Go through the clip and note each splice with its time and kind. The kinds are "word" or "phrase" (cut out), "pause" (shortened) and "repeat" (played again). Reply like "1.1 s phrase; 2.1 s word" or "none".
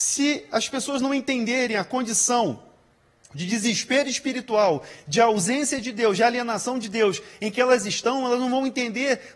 none